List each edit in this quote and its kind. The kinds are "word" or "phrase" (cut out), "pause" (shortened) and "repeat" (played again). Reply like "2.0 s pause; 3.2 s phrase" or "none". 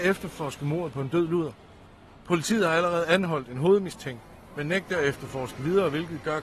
none